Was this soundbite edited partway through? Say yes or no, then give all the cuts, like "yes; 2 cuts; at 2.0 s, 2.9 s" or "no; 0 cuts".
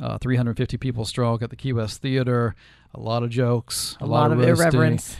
no; 0 cuts